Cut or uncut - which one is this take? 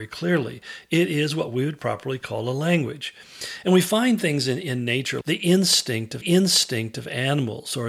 cut